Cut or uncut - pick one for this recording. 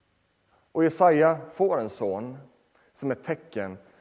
uncut